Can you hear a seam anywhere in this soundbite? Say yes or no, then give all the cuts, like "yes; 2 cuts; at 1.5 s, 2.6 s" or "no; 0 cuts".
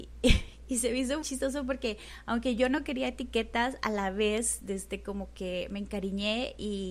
yes; 1 cut; at 1.2 s